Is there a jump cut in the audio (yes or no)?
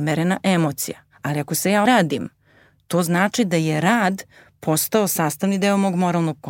yes